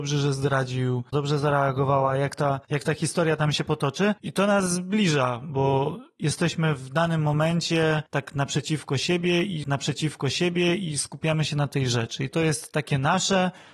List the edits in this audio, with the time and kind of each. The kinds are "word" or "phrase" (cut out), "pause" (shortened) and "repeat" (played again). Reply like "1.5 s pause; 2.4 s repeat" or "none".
1.1 s phrase; 4.2 s pause; 9.6 s repeat; 12.3 s phrase

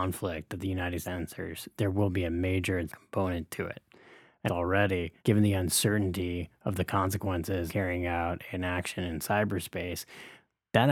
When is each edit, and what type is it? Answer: 1.0 s word; 2.9 s phrase; 4.5 s phrase; 5.2 s pause; 7.7 s word

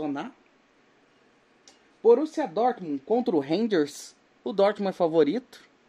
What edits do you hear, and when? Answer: none

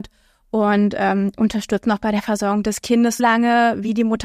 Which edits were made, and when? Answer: 3.2 s word

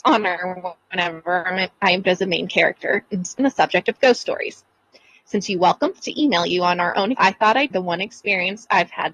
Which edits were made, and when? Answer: 2.0 s word; 3.4 s word; 6.0 s word; 7.1 s word; 7.7 s word

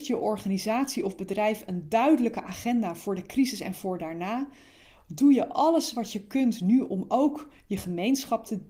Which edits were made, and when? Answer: none

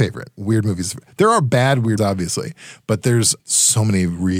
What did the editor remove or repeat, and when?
2.0 s word; 3.4 s word

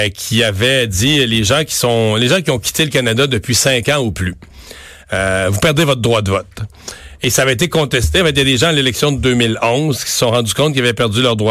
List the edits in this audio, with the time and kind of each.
none

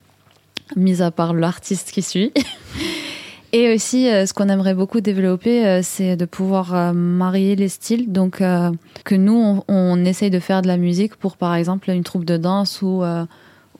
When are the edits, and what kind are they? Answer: 9.0 s pause

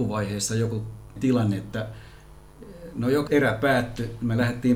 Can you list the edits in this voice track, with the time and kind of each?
1.2 s word; 3.3 s word

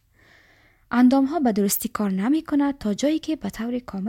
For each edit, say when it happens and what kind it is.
none

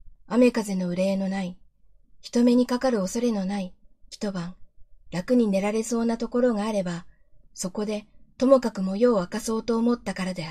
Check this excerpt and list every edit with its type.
8.3 s pause

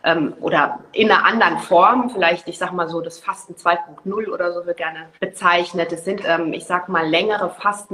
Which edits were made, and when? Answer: 4.8 s phrase; 5.1 s pause; 6.2 s word

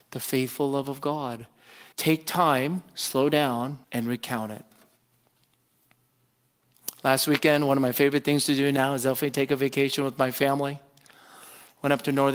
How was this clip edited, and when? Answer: 1.9 s pause; 3.8 s pause

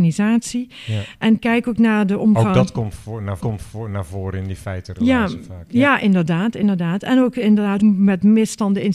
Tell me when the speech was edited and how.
3.4 s repeat; 7.8 s word

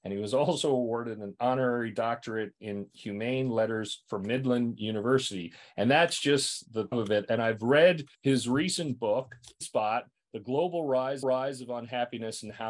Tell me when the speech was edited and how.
6.9 s phrase; 8.1 s pause; 9.6 s word; 11.2 s repeat

